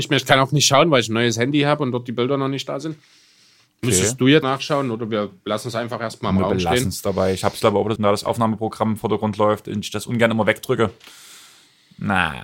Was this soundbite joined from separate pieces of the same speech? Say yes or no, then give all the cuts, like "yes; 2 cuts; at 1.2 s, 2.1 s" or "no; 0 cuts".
yes; 2 cuts; at 4.4 s, 8.0 s